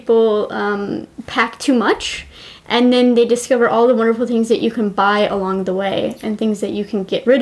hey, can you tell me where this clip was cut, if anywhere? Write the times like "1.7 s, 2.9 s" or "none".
none